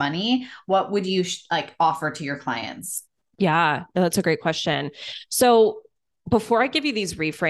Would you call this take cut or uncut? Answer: uncut